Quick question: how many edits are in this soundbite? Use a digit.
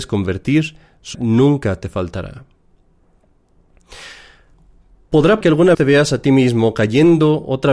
3